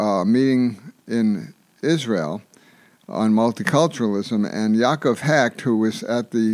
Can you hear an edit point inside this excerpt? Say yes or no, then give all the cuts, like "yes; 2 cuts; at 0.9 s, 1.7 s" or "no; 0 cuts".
no; 0 cuts